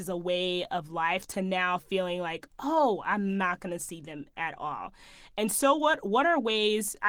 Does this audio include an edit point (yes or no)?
no